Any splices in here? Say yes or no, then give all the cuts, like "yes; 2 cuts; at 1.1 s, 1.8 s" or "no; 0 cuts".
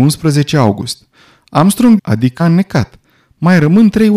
yes; 2 cuts; at 2.0 s, 2.4 s